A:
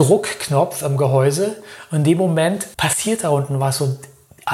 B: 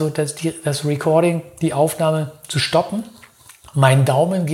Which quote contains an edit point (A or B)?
A